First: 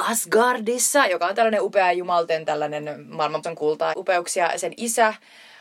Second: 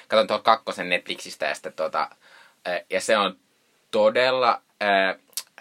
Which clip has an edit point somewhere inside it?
first; 2 cuts; at 3.4 s, 3.9 s

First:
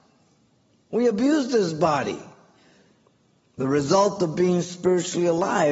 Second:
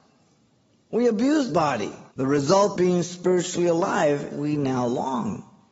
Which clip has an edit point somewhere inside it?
second; 4 cuts; at 1.5 s, 2.1 s, 2.7 s, 4.3 s

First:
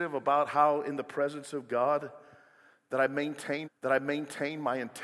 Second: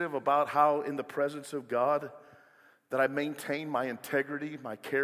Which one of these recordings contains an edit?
first; 1 cut; at 3.6 s

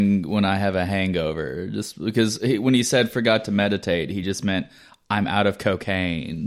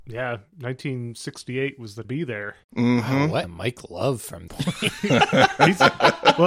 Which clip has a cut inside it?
second; 4 cuts; at 2.0 s, 2.6 s, 3.4 s, 4.5 s

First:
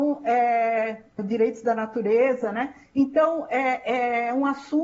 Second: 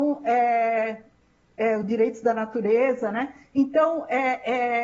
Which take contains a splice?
first; 1 cut; at 1.2 s

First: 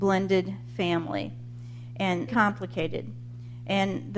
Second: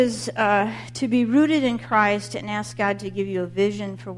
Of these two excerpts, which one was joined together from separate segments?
first; 1 cut; at 2.3 s

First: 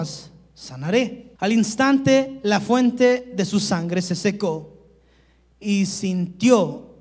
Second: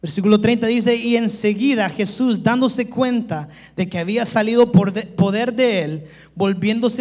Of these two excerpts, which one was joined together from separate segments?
first; 1 cut; at 1.4 s

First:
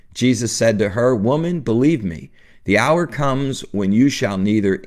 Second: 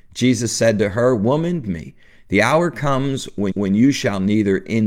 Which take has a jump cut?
second; 2 cuts; at 1.6 s, 3.5 s

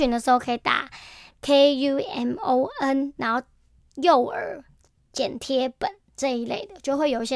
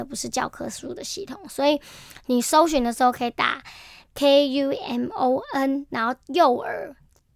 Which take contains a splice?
second; 1 cut; at 6.2 s

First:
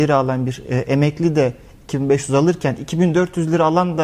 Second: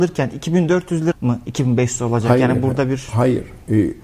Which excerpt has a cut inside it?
second; 1 cut; at 1.1 s

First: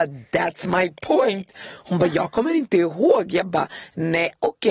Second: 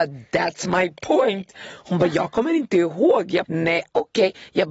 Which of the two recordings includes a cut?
second; 1 cut; at 3.4 s

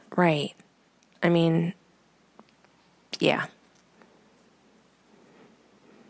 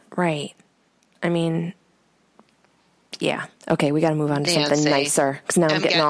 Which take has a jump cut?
second; 1 cut; at 3.6 s

